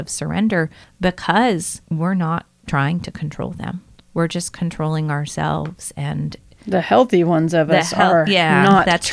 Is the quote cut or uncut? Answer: uncut